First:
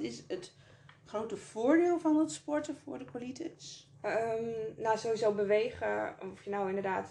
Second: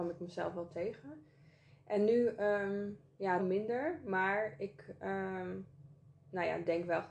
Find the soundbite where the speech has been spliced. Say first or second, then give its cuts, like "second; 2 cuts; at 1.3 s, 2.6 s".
second; 1 cut; at 3.4 s